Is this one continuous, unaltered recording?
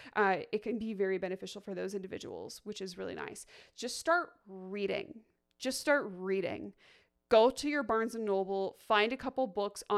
yes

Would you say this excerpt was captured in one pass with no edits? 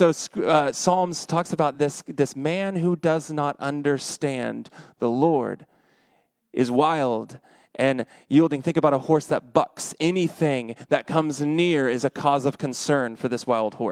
yes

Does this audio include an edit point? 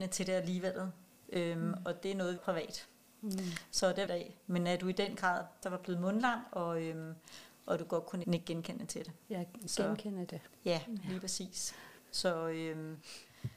yes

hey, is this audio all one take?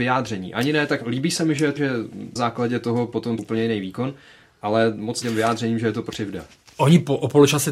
no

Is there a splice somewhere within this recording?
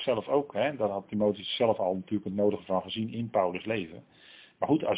no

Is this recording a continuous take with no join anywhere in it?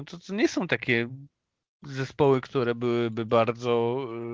yes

